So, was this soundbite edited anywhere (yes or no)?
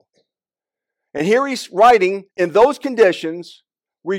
yes